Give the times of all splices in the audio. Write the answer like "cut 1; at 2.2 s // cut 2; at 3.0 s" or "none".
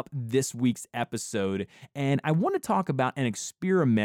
none